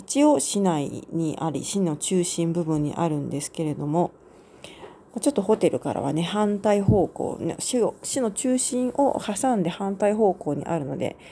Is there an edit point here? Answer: no; 0 cuts

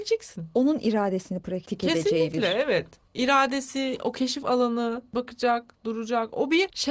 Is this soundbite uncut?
yes; 0 cuts

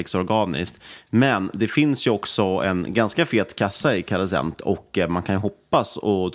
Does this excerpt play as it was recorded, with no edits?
yes; 0 cuts

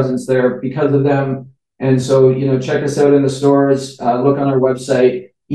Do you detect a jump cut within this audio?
no; 0 cuts

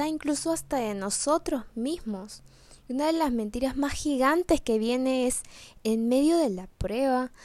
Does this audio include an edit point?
no; 0 cuts

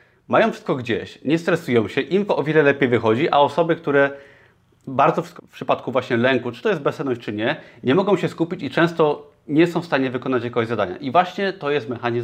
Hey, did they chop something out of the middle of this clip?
yes; 2 cuts; at 2.3 s, 5.4 s

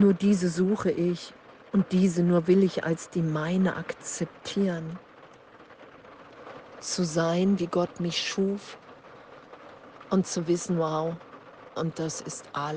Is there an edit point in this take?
no; 0 cuts

